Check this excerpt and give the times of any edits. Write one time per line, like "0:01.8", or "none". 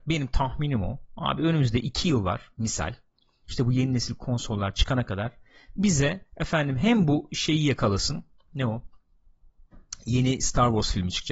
0:06.3